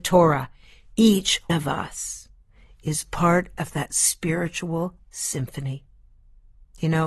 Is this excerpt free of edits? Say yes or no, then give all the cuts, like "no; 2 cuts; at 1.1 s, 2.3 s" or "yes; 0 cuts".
no; 1 cut; at 1.5 s